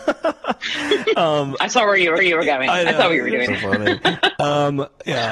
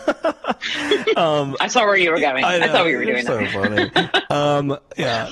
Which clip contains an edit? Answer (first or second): first